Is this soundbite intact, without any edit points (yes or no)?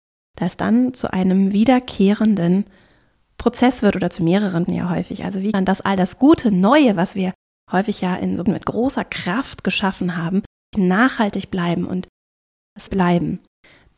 no